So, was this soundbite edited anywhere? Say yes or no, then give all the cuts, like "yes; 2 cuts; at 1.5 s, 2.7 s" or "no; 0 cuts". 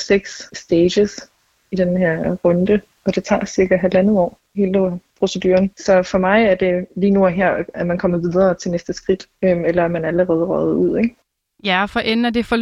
no; 0 cuts